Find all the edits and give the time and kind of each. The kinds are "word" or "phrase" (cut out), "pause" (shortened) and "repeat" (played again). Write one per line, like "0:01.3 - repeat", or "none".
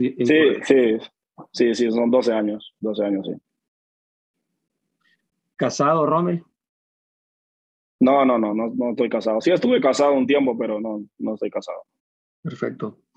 none